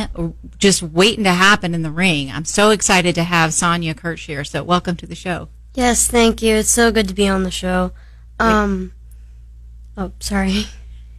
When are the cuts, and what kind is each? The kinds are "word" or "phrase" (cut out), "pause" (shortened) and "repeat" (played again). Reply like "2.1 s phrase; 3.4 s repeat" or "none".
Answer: none